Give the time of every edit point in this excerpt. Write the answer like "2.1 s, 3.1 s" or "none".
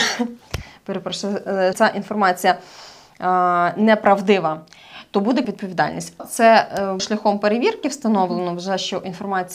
1.7 s, 5.4 s, 6.2 s, 7.0 s